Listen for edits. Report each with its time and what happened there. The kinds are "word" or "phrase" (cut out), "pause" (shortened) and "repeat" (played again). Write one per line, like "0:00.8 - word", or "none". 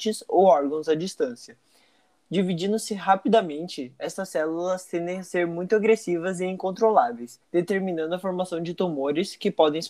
0:07.4 - pause